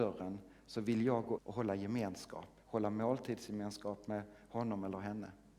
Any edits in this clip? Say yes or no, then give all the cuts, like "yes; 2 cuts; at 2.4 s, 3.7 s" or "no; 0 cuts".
yes; 1 cut; at 1.4 s